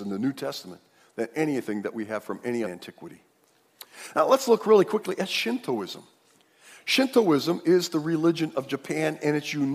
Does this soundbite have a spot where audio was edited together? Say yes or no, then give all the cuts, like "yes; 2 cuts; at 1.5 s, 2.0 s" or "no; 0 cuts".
yes; 1 cut; at 2.6 s